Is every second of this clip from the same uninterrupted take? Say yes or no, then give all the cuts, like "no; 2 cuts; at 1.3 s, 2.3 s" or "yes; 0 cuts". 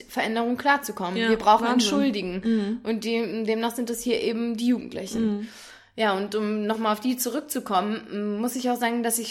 yes; 0 cuts